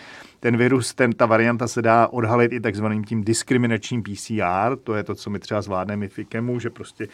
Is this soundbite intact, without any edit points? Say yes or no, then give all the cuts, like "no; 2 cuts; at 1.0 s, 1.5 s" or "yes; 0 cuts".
yes; 0 cuts